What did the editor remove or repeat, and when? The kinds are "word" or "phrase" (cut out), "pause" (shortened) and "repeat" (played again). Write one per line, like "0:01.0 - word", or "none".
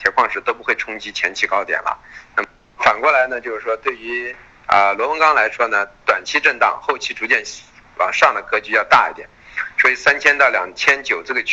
none